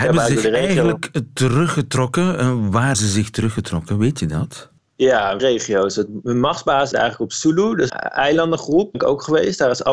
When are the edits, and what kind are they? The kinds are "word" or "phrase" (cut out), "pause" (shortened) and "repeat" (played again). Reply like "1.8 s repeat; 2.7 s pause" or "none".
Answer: 2.9 s word; 5.4 s word; 6.9 s word; 7.9 s word; 8.9 s word